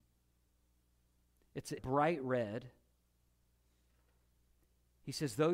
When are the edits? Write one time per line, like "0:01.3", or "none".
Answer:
0:01.8